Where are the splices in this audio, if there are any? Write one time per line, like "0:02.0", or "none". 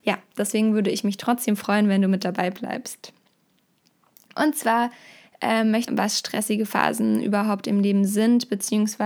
0:05.9